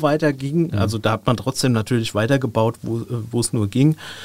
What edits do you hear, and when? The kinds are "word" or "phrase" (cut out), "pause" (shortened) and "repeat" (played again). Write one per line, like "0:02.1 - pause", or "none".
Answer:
none